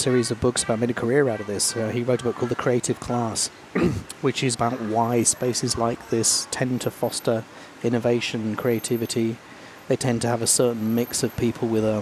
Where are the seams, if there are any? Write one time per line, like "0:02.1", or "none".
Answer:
0:04.5